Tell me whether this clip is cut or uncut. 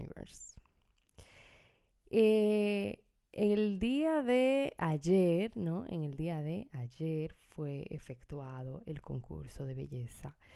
uncut